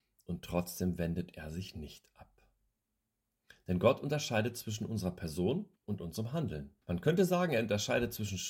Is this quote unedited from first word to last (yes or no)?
no